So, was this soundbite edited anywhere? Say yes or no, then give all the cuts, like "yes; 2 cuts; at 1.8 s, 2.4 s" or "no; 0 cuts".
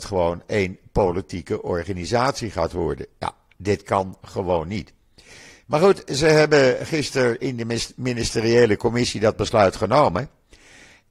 no; 0 cuts